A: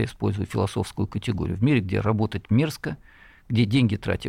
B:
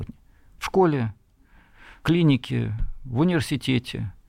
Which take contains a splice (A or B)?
B